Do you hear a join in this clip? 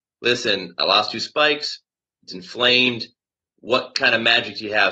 no; 0 cuts

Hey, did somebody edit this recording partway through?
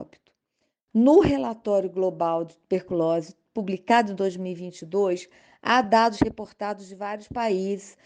no; 0 cuts

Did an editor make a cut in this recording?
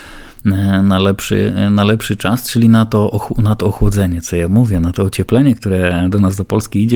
no; 0 cuts

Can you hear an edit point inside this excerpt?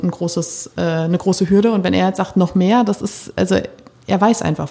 no; 0 cuts

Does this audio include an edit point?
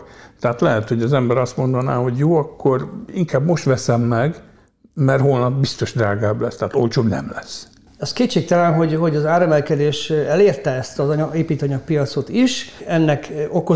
no; 0 cuts

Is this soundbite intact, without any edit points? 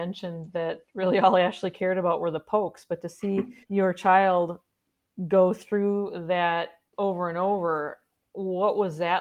no; 2 cuts; at 3.6 s, 6.9 s

